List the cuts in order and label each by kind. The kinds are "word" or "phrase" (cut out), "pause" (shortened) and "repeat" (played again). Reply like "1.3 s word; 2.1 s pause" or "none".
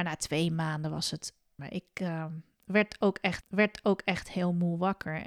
1.6 s phrase; 3.4 s repeat

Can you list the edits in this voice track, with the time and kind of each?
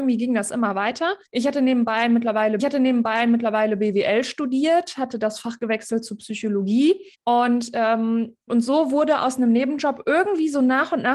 1.3 s pause; 2.6 s repeat; 7.1 s pause; 8.5 s word

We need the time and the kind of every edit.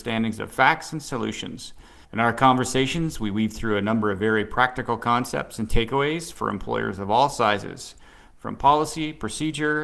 2.0 s pause

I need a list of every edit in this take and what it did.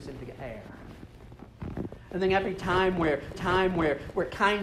3.3 s repeat

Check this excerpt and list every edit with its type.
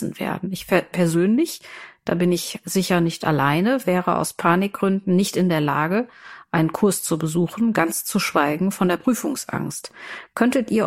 none

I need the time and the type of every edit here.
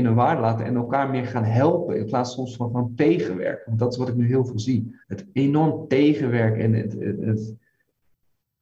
5.0 s pause

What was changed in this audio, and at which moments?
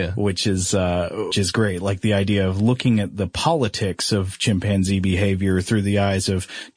1.3 s word

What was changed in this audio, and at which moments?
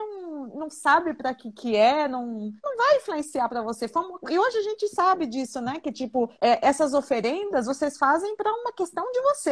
2.6 s pause; 6.3 s pause

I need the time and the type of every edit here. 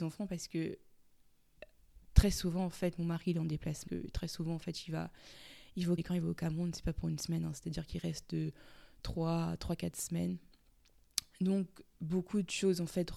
3.9 s word; 6.0 s word; 11.9 s pause

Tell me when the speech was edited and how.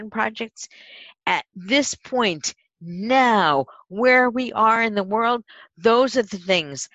none

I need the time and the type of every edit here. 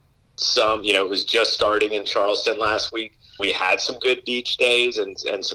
3.4 s word

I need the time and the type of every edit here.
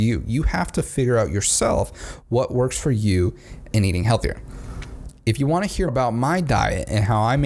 3.7 s word; 5.9 s word

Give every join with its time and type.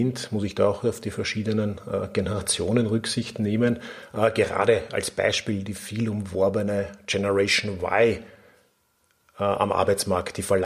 none

